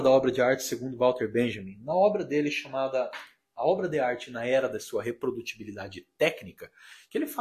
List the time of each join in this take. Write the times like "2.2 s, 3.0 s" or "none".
none